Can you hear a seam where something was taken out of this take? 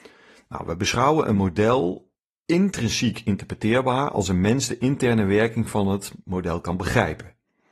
no; 0 cuts

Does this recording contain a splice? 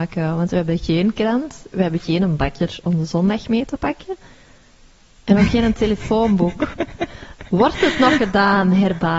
no; 0 cuts

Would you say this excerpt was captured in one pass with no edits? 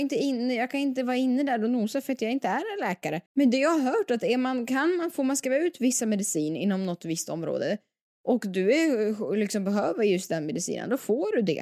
no; 1 cut; at 3.3 s

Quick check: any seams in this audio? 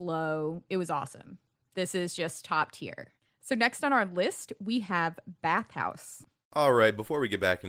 no; 0 cuts

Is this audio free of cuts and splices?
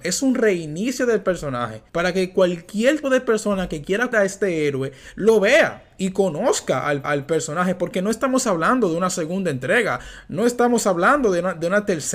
no; 4 cuts; at 1.9 s, 3.0 s, 4.1 s, 7.0 s

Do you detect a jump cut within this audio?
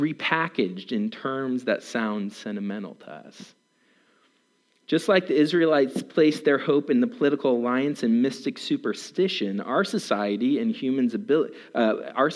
no; 0 cuts

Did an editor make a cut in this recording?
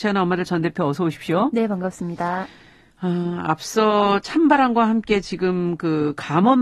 no; 0 cuts

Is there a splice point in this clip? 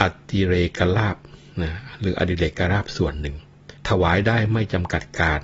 yes; 1 cut; at 3.8 s

